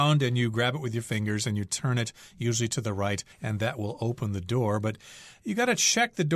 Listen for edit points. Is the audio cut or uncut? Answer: cut